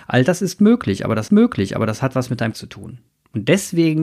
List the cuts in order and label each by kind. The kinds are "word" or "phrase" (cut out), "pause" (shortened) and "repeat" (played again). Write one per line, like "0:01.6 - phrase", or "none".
0:01.3 - repeat
0:02.5 - word
0:03.1 - pause